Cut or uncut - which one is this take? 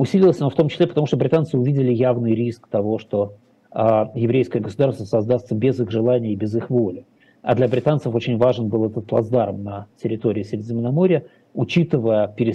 uncut